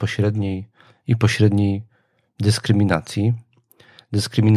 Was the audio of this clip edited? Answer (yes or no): no